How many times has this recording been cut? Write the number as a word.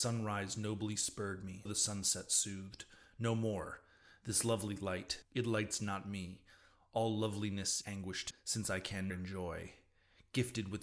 four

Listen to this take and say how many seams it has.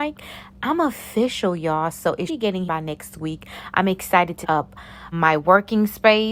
four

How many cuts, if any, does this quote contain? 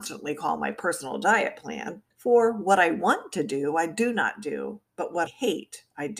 two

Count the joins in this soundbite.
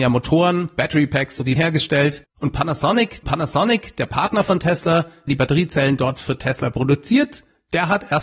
four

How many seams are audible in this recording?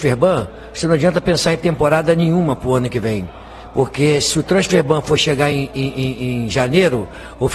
zero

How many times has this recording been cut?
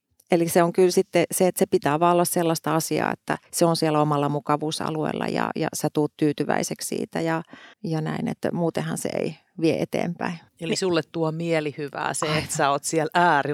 three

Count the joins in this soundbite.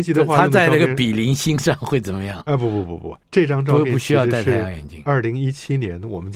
one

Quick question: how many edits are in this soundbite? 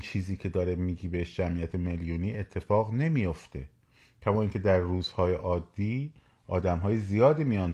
zero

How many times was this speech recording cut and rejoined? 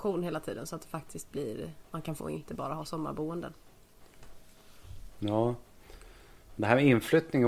one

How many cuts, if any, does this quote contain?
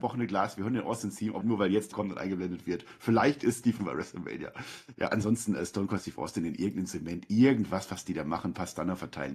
three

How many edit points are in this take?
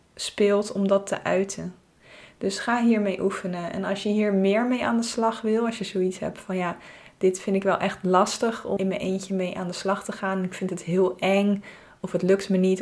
one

